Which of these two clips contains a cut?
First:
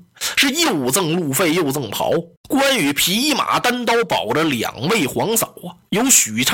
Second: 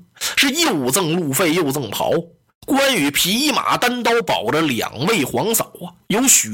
first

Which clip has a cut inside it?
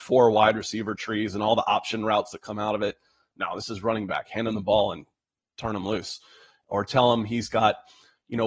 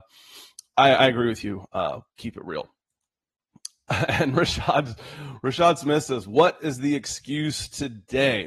second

